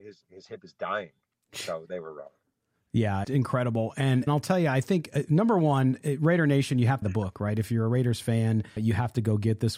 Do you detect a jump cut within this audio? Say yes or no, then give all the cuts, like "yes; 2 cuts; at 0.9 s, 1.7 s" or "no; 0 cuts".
yes; 4 cuts; at 3.2 s, 4.3 s, 7.0 s, 8.8 s